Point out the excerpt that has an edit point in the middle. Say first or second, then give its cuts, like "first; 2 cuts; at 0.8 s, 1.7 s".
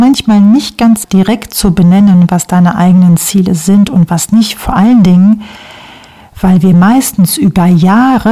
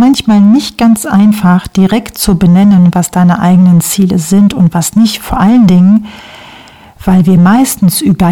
first; 1 cut; at 1.0 s